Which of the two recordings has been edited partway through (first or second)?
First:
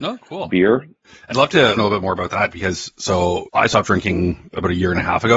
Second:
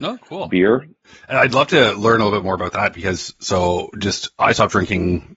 first